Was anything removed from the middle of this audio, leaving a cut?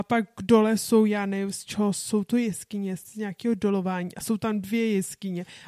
no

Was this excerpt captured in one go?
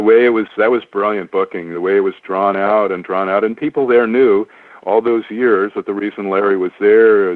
yes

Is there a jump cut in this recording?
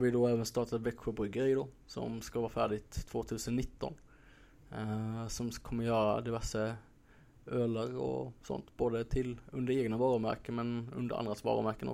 no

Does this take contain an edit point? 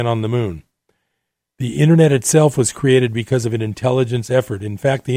no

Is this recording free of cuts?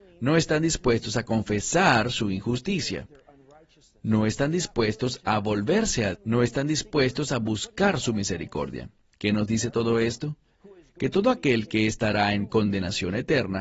no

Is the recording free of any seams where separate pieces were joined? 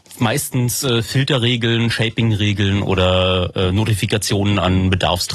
yes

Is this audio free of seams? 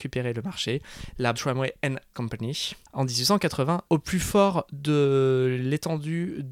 no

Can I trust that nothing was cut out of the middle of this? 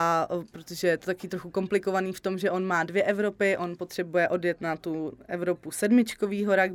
yes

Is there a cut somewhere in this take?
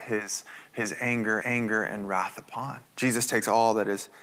yes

